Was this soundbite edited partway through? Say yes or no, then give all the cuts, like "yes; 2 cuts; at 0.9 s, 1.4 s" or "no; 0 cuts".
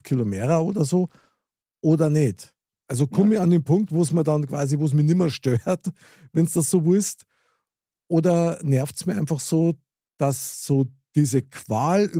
no; 0 cuts